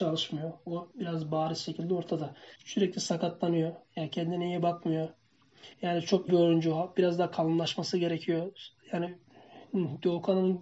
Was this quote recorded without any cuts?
no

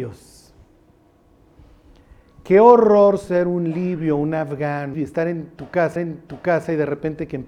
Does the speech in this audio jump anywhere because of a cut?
yes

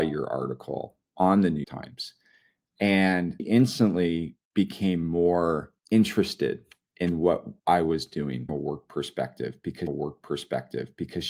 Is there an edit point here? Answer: yes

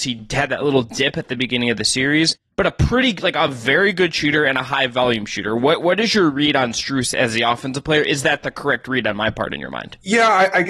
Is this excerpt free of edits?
yes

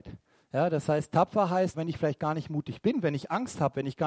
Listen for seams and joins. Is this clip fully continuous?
no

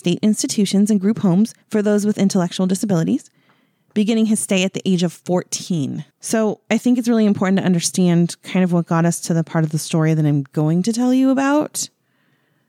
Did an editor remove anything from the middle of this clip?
yes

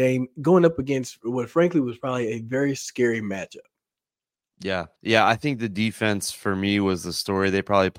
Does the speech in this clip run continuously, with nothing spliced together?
no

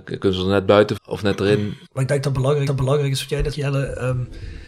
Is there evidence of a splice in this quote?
yes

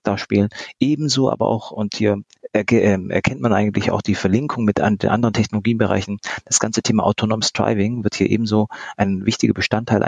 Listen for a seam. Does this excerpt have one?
no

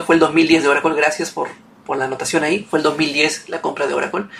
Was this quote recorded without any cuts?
yes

